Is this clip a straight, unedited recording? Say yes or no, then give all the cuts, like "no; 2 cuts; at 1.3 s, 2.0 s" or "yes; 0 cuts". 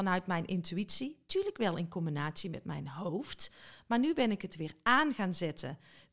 yes; 0 cuts